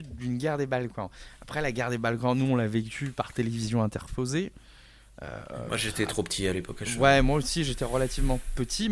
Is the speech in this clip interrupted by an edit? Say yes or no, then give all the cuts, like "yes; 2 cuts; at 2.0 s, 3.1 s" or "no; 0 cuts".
no; 0 cuts